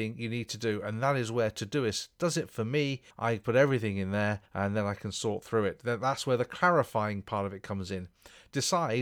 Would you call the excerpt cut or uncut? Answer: cut